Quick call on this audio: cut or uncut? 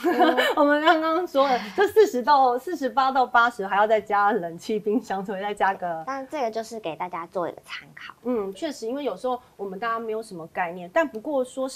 cut